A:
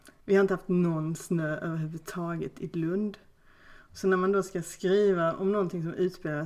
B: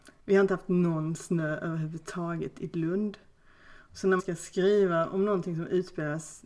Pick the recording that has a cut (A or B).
B